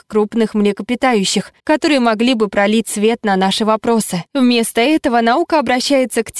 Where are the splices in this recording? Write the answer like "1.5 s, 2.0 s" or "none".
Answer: 1.6 s, 4.3 s